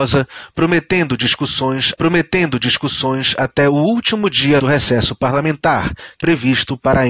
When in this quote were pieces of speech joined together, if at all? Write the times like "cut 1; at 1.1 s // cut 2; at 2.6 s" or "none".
cut 1; at 1.9 s // cut 2; at 4.6 s // cut 3; at 6.2 s